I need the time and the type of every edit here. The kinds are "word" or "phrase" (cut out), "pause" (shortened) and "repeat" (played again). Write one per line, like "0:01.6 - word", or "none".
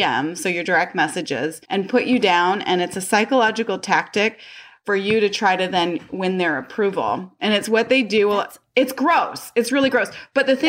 0:01.6 - pause